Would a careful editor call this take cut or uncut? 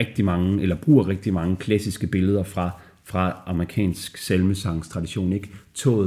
uncut